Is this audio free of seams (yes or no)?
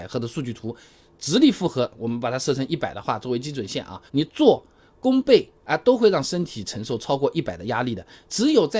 no